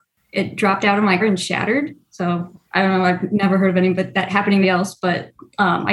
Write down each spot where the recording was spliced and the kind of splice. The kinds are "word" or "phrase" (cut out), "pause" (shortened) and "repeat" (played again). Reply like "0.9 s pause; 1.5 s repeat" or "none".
1.2 s word; 2.7 s pause; 4.6 s phrase